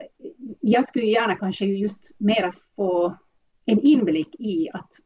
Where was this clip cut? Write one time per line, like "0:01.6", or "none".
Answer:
none